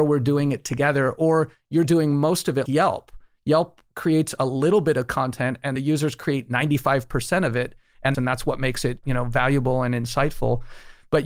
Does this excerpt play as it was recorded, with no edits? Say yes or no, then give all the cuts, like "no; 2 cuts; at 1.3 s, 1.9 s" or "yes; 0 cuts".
no; 3 cuts; at 2.7 s, 5.8 s, 8.1 s